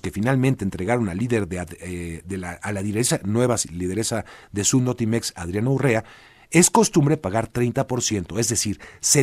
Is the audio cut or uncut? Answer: uncut